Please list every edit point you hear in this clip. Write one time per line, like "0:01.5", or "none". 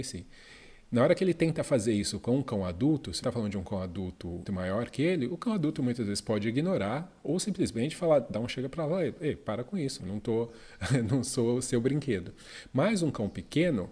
0:03.2
0:04.5
0:10.0